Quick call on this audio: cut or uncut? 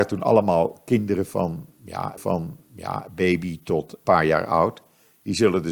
cut